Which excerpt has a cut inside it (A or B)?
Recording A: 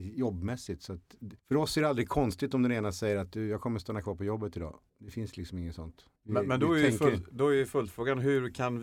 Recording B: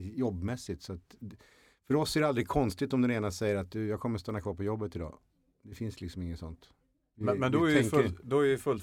A